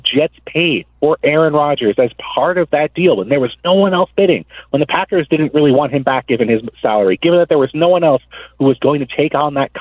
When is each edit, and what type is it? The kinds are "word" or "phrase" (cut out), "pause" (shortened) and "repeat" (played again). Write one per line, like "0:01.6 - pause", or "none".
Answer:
0:00.9 - pause